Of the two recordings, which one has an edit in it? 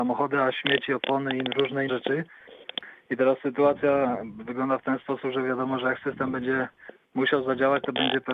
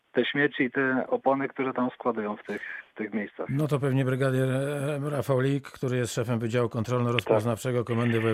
first; 1 cut; at 1.9 s

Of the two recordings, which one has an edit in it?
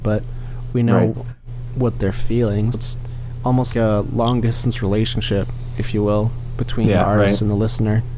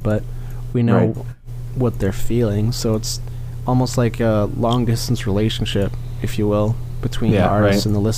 first; 2 cuts; at 2.7 s, 3.7 s

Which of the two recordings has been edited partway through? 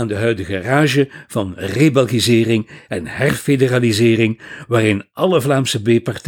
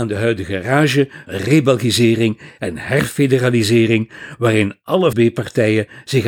second; 2 cuts; at 1.3 s, 5.1 s

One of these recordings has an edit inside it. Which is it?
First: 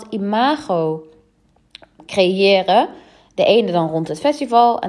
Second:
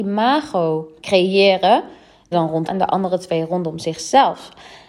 second; 3 cuts; at 1.0 s, 2.3 s, 2.7 s

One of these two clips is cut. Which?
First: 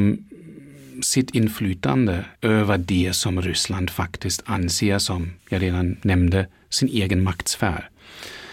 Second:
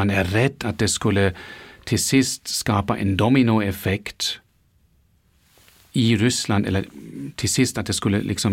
first; 2 cuts; at 2.4 s, 5.4 s

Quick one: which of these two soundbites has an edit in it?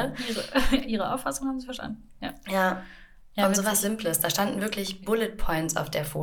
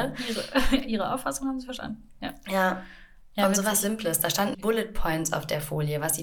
second; 1 cut; at 4.5 s

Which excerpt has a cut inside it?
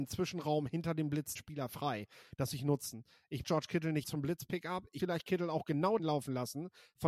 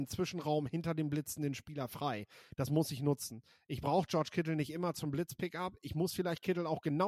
first; 6 cuts; at 1.4 s, 2.5 s, 3.4 s, 4.0 s, 5.0 s, 6.0 s

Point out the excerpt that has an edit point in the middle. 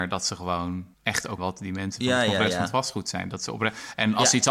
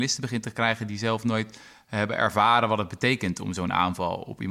first; 2 cuts; at 0.9 s, 1.4 s

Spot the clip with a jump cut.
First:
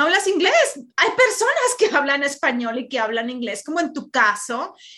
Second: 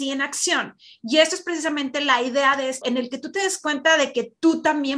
second; 1 cut; at 2.8 s

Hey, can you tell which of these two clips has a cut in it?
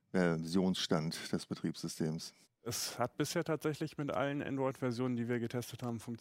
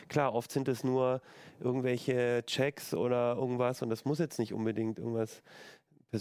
first; 1 cut; at 2.4 s

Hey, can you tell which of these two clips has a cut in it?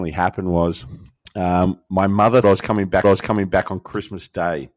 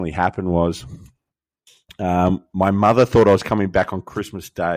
first; 3 cuts; at 1.2 s, 2.4 s, 3.0 s

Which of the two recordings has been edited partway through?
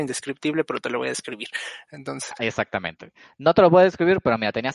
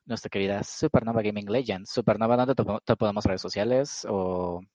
second; 1 cut; at 3.2 s

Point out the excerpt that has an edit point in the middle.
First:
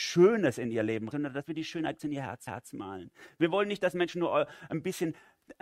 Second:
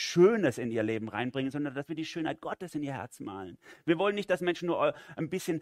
first; 3 cuts; at 1.1 s, 2.0 s, 2.5 s

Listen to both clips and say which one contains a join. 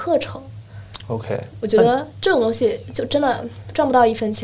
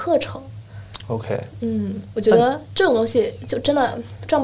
first; 1 cut; at 1.6 s

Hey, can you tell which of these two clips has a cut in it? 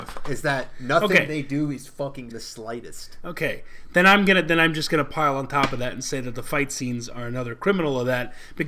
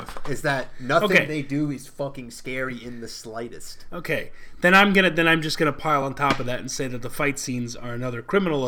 first; 1 cut; at 2.3 s

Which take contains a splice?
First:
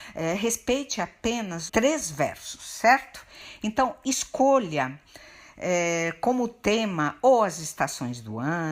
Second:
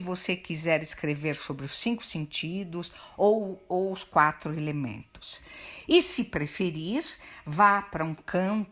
first; 1 cut; at 1.7 s

